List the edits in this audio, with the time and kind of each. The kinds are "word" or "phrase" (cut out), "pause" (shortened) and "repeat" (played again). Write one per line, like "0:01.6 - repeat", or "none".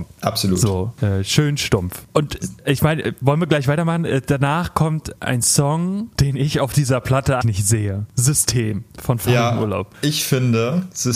0:07.4 - word